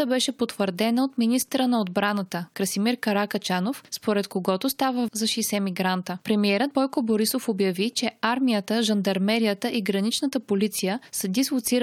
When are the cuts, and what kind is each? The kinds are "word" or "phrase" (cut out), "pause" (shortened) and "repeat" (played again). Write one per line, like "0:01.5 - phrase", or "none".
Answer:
0:05.1 - word